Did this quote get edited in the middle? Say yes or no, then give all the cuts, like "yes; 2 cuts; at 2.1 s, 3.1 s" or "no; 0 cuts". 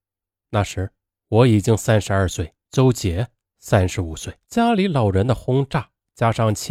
yes; 2 cuts; at 2.6 s, 4.4 s